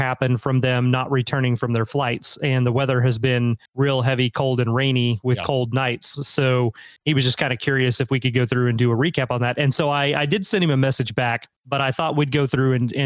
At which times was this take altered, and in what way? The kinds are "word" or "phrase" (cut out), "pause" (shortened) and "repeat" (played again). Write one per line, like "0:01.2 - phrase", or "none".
0:03.7 - pause
0:07.0 - pause
0:11.6 - pause